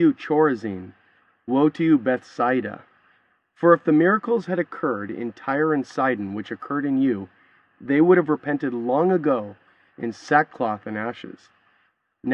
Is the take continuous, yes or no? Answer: yes